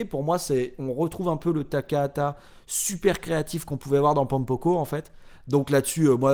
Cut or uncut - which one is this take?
uncut